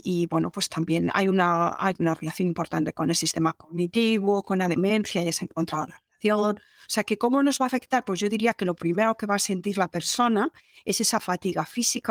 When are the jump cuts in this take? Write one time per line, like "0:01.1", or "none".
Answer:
none